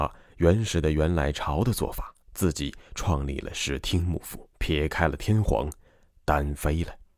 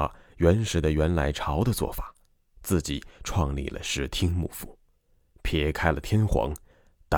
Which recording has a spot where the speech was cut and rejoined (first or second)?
first